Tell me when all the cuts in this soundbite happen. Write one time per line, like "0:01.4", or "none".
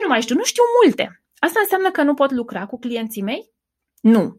none